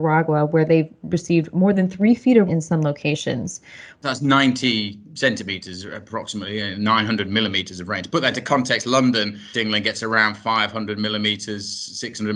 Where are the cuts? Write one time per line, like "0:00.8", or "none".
0:02.5
0:09.5